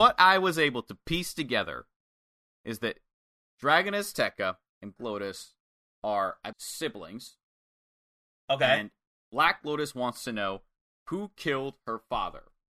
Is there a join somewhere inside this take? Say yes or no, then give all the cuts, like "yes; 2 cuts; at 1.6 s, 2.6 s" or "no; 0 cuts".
yes; 2 cuts; at 5.0 s, 6.5 s